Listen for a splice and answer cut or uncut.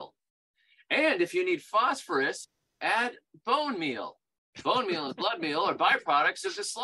uncut